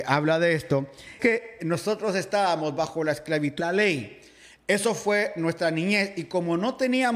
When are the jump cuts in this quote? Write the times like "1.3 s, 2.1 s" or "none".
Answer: 1.2 s, 1.6 s, 3.6 s

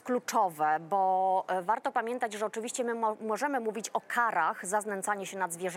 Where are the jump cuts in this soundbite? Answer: none

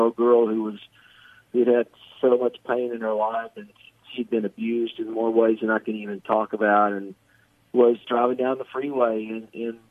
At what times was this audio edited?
8.0 s

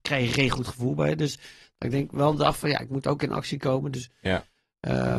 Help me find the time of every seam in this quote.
none

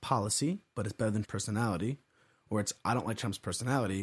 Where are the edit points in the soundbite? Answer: 1.2 s

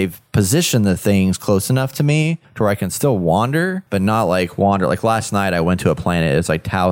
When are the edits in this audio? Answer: 2.4 s, 3.9 s

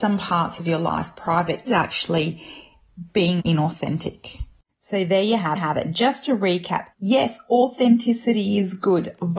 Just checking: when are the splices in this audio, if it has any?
1.7 s, 3.4 s, 4.6 s, 5.6 s, 6.9 s

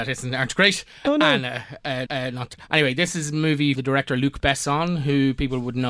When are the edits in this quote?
1.0 s, 2.1 s, 2.5 s, 3.7 s

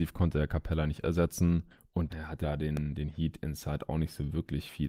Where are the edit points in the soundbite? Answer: 1.0 s, 2.1 s, 2.4 s

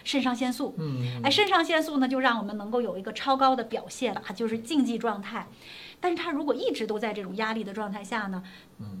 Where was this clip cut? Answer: 4.1 s

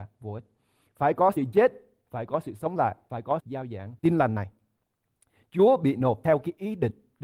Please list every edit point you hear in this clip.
3.4 s

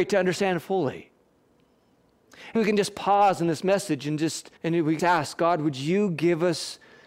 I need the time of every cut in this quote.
2.6 s, 4.6 s, 5.0 s

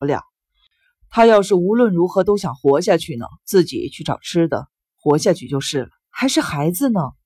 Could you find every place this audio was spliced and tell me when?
3.4 s, 6.0 s

